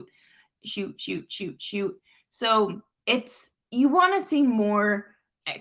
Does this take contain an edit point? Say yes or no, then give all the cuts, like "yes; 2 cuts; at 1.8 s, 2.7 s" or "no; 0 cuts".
no; 0 cuts